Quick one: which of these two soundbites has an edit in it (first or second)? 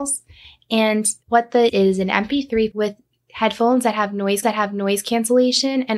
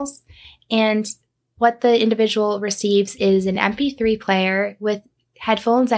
first